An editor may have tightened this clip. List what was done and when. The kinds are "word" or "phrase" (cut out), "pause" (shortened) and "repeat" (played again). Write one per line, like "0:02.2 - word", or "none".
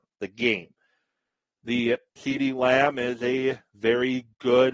0:02.2 - word